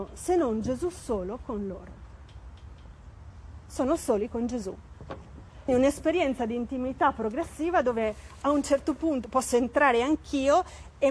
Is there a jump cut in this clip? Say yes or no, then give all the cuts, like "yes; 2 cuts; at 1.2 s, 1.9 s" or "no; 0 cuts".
yes; 1 cut; at 5.7 s